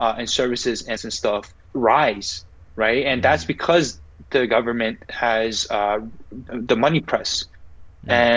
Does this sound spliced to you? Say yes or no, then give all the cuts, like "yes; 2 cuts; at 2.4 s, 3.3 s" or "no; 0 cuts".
yes; 4 cuts; at 1.0 s, 1.7 s, 5.0 s, 6.5 s